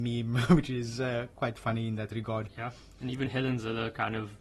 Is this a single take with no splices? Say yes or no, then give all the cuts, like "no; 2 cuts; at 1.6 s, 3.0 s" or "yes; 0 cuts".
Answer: no; 1 cut; at 1.3 s